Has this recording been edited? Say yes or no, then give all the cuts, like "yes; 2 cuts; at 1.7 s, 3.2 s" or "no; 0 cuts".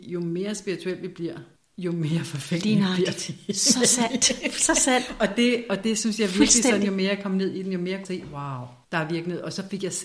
yes; 3 cuts; at 1.6 s, 8.0 s, 8.8 s